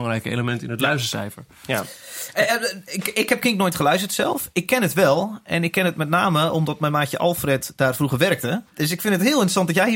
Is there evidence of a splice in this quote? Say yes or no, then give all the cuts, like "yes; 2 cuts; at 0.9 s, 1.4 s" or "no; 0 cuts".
yes; 1 cut; at 8.7 s